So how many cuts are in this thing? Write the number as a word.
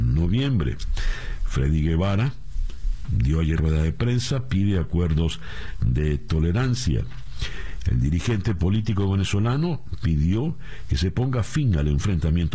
two